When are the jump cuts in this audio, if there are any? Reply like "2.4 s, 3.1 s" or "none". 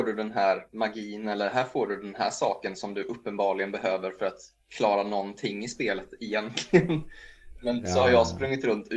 none